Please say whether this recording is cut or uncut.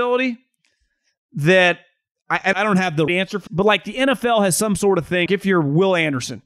cut